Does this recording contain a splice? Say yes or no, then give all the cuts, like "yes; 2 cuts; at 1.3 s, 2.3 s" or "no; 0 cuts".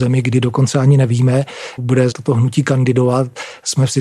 yes; 2 cuts; at 1.8 s, 2.1 s